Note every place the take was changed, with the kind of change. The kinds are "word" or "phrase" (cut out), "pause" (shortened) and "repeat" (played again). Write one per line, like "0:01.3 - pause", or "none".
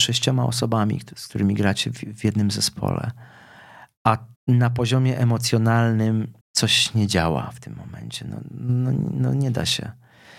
0:04.4 - pause
0:06.4 - pause